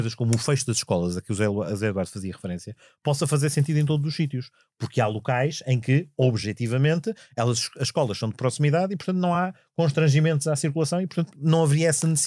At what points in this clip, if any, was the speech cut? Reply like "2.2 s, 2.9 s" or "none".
none